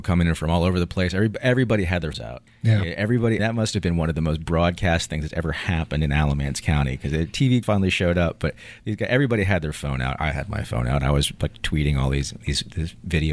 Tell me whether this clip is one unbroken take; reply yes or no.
no